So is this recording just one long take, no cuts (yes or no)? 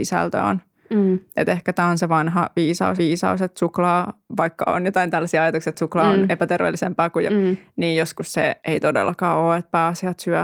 no